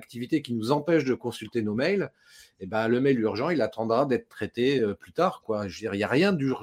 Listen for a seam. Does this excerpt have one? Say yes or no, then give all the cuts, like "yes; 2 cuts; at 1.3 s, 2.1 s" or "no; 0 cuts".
no; 0 cuts